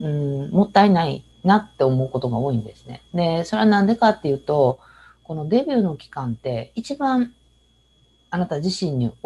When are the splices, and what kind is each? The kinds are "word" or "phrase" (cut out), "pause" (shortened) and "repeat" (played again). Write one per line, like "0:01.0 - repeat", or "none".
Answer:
0:01.3 - pause
0:03.1 - pause

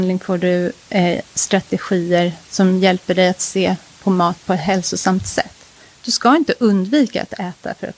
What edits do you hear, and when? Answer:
none

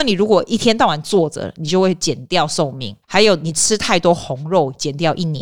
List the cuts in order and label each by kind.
0:03.0 - pause

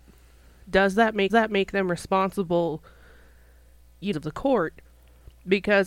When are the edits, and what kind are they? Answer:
0:01.3 - repeat
0:04.1 - phrase

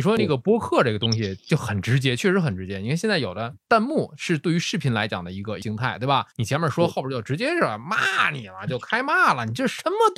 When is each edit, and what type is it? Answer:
0:06.3 - pause

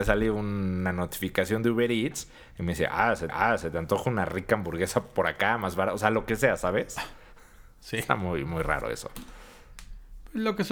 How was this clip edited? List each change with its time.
0:03.3 - repeat

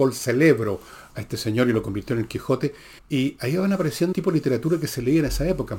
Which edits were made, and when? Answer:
0:01.1 - word
0:03.0 - pause
0:04.1 - word

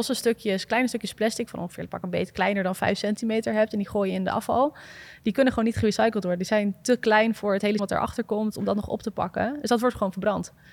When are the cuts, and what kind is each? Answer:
0:07.8 - word

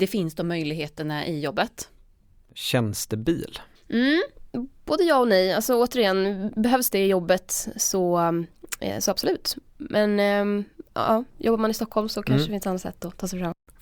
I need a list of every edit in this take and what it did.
0:03.8 - pause

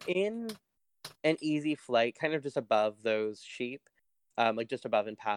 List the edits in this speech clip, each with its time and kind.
none

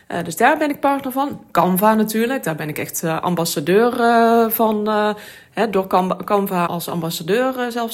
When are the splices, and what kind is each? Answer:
0:06.7 - word

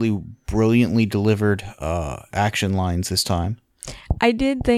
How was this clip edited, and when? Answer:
none

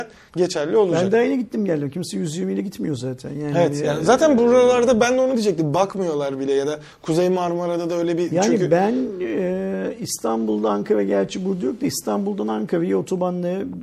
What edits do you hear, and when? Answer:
none

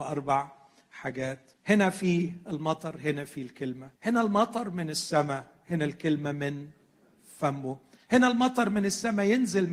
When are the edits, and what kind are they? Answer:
0:01.6 - pause
0:04.0 - pause

